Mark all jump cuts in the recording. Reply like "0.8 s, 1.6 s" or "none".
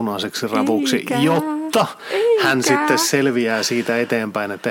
none